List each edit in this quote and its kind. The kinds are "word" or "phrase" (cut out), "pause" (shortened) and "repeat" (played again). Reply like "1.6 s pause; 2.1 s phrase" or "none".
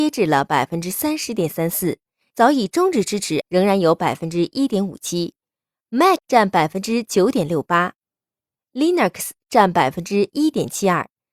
3.4 s word; 6.2 s word